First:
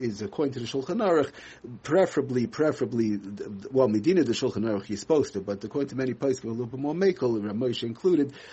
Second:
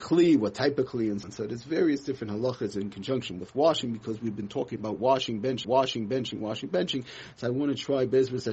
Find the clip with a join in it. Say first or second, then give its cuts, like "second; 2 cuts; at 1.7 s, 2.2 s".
second; 2 cuts; at 1.2 s, 5.6 s